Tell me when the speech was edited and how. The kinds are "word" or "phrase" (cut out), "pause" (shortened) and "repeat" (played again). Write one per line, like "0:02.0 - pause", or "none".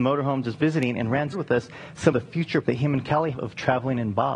0:01.3 - word
0:02.1 - word
0:02.6 - word
0:03.3 - word